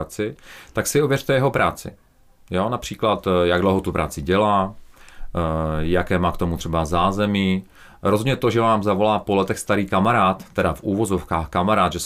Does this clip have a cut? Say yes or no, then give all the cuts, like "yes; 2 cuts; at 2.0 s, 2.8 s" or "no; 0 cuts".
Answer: no; 0 cuts